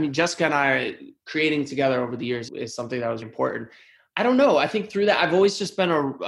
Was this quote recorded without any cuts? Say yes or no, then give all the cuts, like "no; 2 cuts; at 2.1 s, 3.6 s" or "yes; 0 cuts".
no; 2 cuts; at 2.5 s, 3.2 s